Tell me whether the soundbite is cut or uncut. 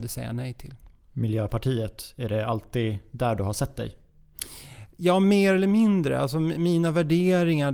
uncut